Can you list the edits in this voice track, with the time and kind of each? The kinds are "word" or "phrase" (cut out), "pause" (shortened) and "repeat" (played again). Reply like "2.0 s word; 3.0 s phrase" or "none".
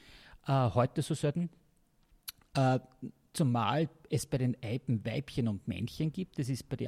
none